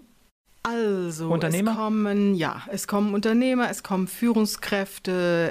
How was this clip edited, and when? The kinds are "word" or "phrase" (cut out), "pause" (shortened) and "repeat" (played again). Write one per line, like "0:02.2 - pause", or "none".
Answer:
none